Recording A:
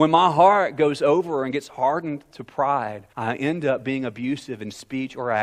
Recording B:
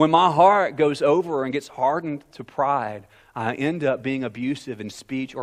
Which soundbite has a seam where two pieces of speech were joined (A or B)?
A